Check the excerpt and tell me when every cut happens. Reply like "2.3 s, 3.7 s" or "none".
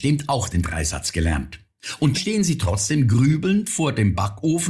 2.1 s